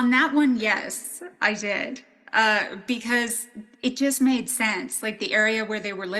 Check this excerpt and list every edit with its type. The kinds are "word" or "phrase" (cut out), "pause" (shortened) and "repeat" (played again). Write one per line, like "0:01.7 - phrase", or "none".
none